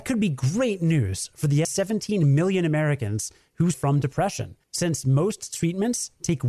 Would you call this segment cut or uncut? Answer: cut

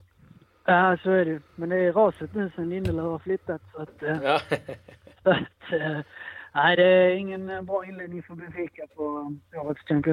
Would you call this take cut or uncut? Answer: uncut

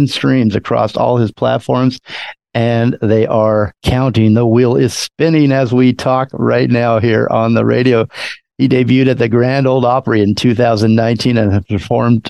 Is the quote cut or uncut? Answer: cut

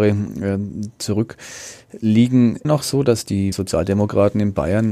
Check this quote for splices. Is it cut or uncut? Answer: cut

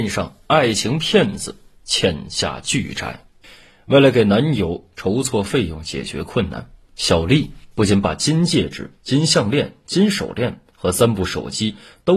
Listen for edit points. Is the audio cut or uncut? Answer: cut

